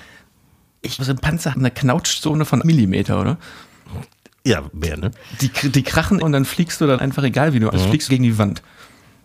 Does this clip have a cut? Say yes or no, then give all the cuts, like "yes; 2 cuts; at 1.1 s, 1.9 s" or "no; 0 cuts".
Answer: yes; 8 cuts; at 1.0 s, 1.5 s, 2.6 s, 4.9 s, 6.2 s, 7.0 s, 7.7 s, 8.1 s